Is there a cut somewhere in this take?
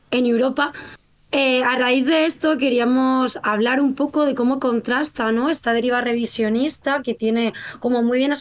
no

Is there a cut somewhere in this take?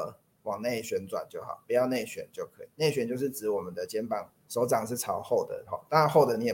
yes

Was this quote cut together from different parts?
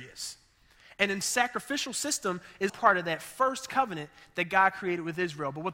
yes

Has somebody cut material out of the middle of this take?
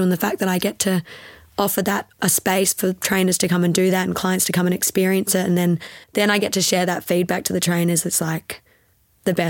yes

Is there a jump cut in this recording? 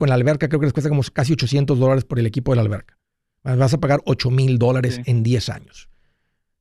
no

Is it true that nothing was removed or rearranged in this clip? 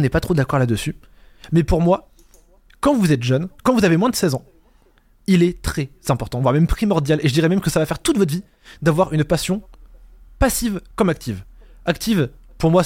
yes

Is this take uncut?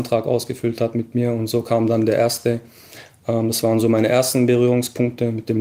yes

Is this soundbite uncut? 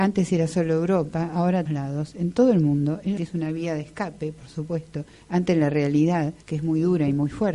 no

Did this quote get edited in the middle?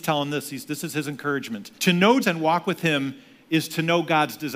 yes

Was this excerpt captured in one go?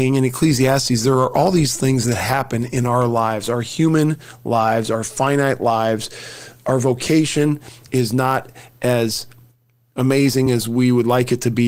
yes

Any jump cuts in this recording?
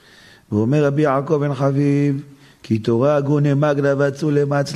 no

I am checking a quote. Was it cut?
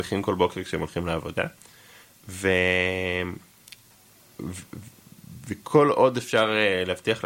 no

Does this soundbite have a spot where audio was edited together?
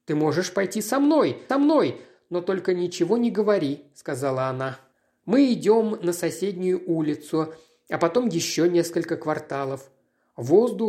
yes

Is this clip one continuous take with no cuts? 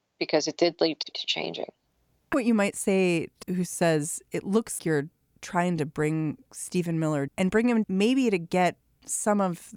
no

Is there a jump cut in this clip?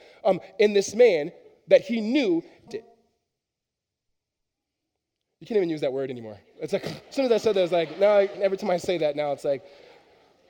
yes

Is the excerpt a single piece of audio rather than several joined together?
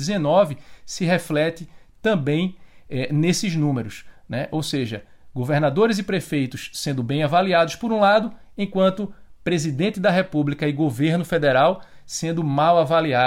yes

